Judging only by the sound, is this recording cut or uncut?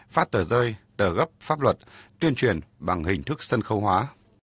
uncut